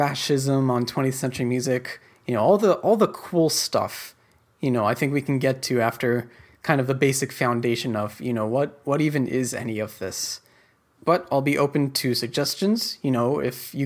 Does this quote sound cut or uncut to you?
uncut